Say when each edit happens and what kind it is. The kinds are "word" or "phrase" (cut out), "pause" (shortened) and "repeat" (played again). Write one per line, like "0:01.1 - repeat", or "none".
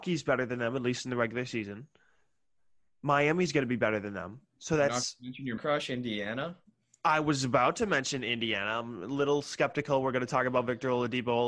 0:05.6 - word

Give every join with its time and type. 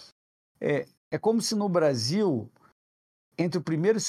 0:01.0 - pause

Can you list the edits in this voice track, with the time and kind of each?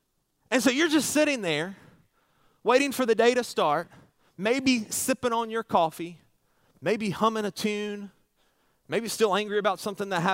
none

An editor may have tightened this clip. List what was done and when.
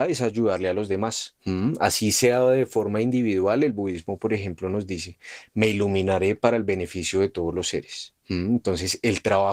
0:01.4 - pause
0:08.2 - pause

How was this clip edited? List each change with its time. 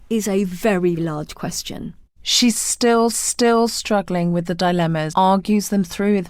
0:01.0 - word
0:02.1 - pause
0:03.1 - repeat
0:05.1 - word

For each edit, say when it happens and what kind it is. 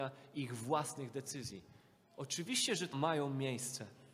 0:02.9 - word

